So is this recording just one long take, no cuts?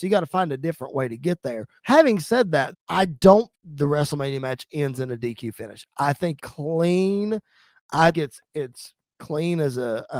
no; 5 cuts; at 1.8 s, 2.7 s, 3.5 s, 6.4 s, 8.1 s

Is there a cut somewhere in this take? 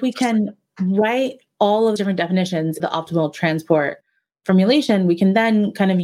yes; 2 cuts; at 2.0 s, 2.8 s

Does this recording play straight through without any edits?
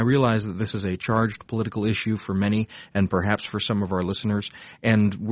yes; 0 cuts

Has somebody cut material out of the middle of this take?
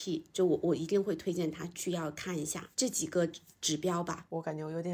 no; 0 cuts

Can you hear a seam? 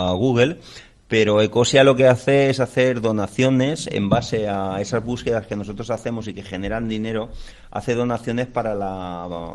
no; 0 cuts

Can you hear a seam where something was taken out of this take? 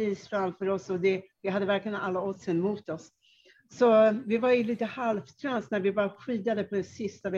no; 0 cuts

